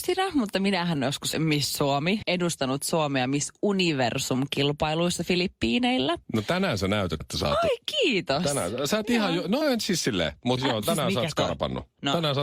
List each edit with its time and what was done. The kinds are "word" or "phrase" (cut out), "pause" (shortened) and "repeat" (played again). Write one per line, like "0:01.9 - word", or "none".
0:01.0 - word
0:01.3 - word
0:02.2 - word
0:07.2 - word
0:09.6 - word
0:10.6 - word